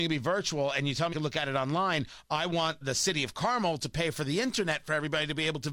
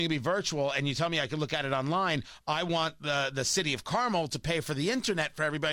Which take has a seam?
first; 2 cuts; at 1.1 s, 2.8 s

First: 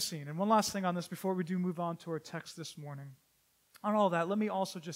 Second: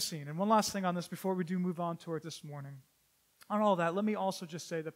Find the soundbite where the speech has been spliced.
second; 1 cut; at 2.2 s

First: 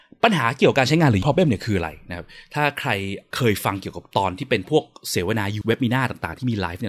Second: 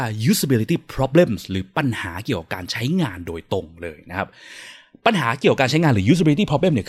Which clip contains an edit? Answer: first; 2 cuts; at 1.2 s, 5.6 s

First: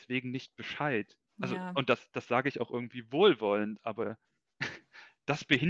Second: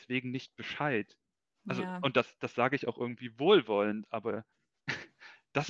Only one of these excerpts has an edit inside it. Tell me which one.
first; 1 cut; at 1.3 s

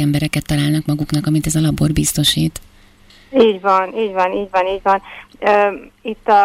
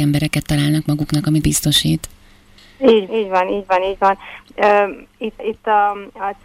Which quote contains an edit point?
second; 3 cuts; at 1.4 s, 3.1 s, 5.4 s

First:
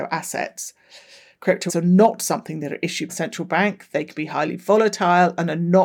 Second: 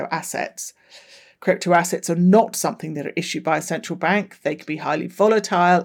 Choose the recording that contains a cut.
first; 2 cuts; at 1.7 s, 3.1 s

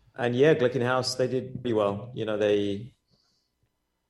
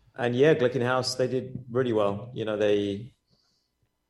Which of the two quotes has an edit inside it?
first; 1 cut; at 1.6 s

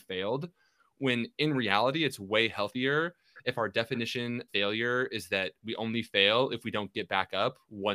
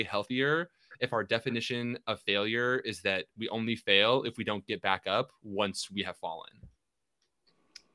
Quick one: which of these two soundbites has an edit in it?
first; 1 cut; at 4.5 s

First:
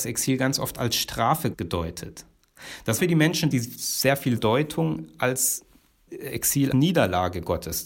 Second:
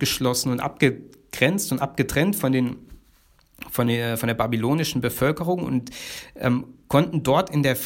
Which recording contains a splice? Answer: first; 6 cuts; at 1.5 s, 3.0 s, 3.5 s, 4.4 s, 6.1 s, 6.7 s

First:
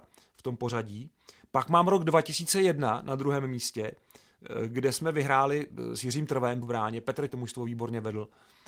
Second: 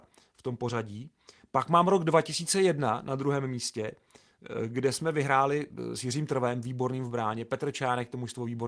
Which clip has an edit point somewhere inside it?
first; 2 cuts; at 6.6 s, 7.3 s

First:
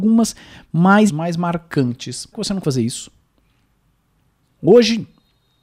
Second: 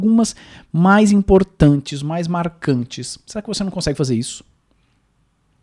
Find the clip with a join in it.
first; 3 cuts; at 1.1 s, 2.3 s, 2.6 s

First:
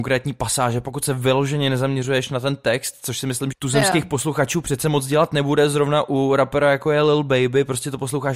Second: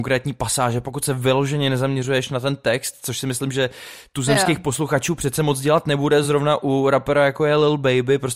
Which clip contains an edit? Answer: first; 1 cut; at 3.5 s

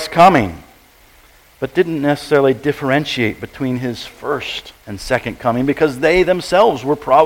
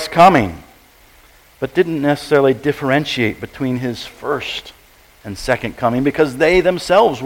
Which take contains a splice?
first; 1 cut; at 4.8 s

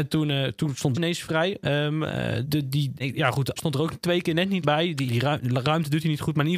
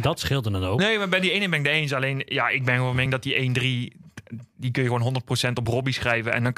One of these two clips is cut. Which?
first; 6 cuts; at 0.9 s, 2.4 s, 3.0 s, 3.6 s, 4.6 s, 5.1 s

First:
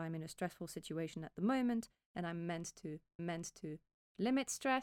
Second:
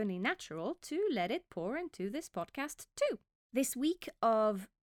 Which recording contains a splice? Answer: first; 1 cut; at 3.2 s

